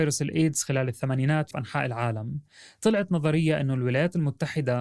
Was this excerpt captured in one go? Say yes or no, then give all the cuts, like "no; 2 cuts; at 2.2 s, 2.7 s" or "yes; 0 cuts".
no; 1 cut; at 1.5 s